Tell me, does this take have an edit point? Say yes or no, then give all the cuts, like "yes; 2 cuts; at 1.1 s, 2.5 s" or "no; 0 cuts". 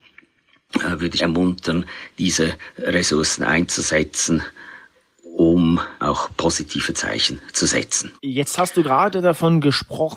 yes; 3 cuts; at 1.2 s, 6.0 s, 8.2 s